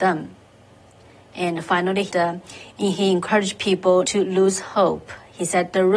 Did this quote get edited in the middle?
yes; 3 cuts; at 2.1 s, 2.7 s, 4.1 s

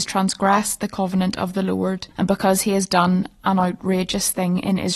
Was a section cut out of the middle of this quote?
yes; 1 cut; at 2.1 s

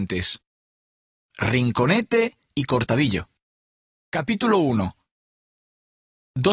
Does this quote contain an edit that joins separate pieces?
no; 0 cuts

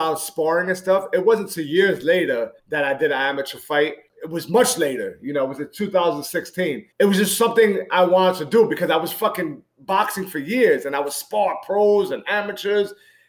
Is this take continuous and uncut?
no; 3 cuts; at 2.6 s, 4.1 s, 6.9 s

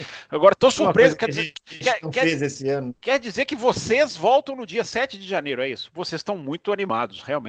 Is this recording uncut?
no; 1 cut; at 3.0 s

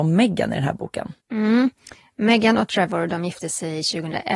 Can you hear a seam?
yes; 1 cut; at 1.2 s

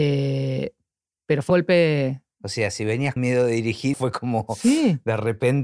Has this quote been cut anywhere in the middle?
yes; 3 cuts; at 1.5 s, 3.2 s, 3.9 s

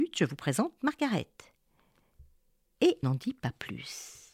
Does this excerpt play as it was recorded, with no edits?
no; 1 cut; at 3.0 s

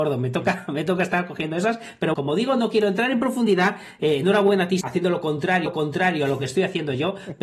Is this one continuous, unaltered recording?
no; 3 cuts; at 2.1 s, 4.8 s, 5.7 s

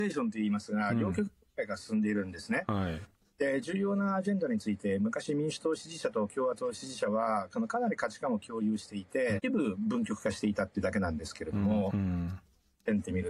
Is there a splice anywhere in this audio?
yes; 1 cut; at 9.4 s

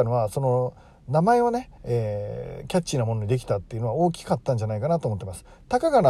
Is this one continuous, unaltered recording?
no; 1 cut; at 1.8 s

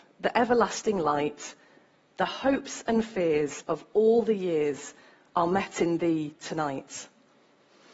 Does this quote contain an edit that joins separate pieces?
no; 0 cuts

